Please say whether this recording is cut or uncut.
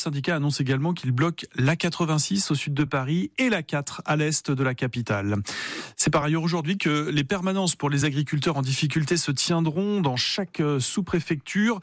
uncut